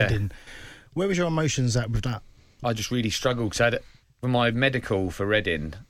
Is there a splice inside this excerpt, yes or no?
no